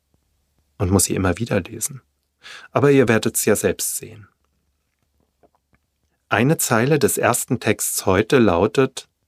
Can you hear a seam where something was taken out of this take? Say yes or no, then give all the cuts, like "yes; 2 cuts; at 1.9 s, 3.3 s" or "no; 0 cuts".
no; 0 cuts